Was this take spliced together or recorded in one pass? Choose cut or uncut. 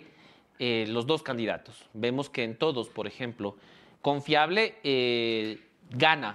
uncut